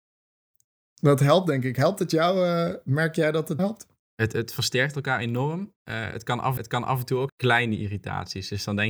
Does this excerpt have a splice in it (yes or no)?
yes